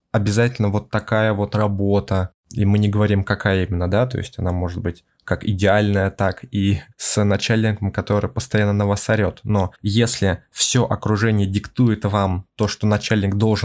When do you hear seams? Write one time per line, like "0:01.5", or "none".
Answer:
0:02.4
0:06.9
0:09.7